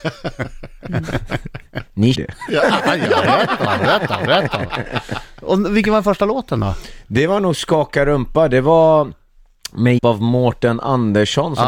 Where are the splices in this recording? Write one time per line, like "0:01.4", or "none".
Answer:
0:02.1
0:02.8
0:10.0